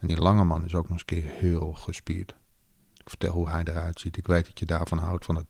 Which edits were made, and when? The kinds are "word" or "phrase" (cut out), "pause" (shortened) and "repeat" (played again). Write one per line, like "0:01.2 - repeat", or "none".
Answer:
none